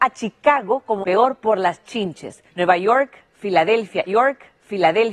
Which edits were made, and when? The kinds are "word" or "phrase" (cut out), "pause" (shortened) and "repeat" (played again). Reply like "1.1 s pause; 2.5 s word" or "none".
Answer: 1.0 s word; 2.5 s pause; 4.1 s repeat